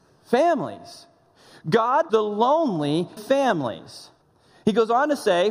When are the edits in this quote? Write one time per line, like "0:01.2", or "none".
0:02.1
0:03.2
0:04.2